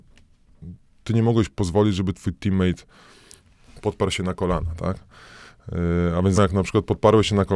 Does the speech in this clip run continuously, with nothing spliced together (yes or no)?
no